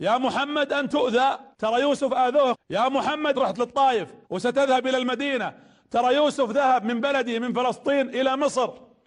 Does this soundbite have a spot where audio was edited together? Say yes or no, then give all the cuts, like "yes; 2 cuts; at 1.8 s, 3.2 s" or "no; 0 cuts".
yes; 5 cuts; at 0.9 s, 1.5 s, 2.5 s, 3.3 s, 4.2 s